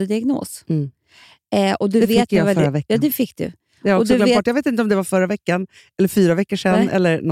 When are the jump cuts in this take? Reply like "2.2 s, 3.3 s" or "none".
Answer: none